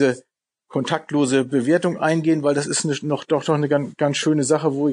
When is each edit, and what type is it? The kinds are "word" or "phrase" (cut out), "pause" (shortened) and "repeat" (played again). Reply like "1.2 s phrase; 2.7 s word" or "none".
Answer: none